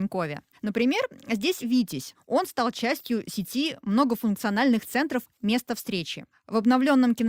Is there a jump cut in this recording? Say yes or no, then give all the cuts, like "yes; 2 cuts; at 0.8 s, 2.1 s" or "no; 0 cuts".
yes; 1 cut; at 1.6 s